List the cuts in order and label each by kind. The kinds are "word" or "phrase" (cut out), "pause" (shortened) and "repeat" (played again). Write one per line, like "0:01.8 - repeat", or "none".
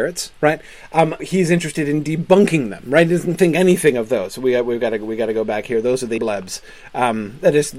0:01.2 - word
0:06.2 - word